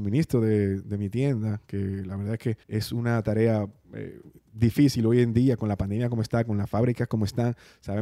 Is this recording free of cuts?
no; 2 cuts; at 2.6 s, 4.4 s

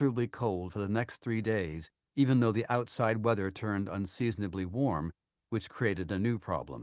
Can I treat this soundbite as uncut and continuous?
yes; 0 cuts

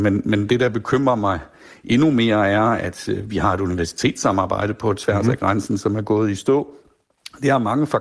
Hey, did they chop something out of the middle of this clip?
no; 0 cuts

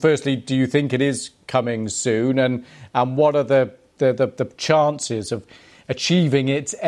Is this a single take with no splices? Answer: yes; 0 cuts

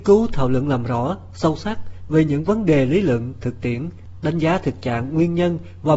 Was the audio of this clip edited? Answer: no; 0 cuts

